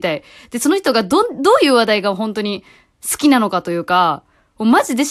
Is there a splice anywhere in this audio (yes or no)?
no